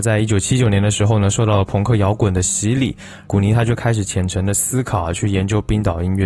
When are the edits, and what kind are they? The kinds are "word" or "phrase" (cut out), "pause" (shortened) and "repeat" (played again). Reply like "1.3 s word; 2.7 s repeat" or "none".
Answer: 3.3 s phrase